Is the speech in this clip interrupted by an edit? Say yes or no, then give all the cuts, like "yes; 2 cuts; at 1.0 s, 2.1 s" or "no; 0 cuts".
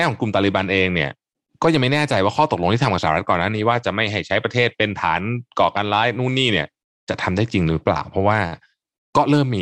no; 0 cuts